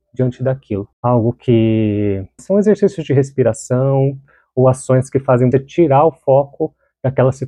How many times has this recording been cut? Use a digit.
3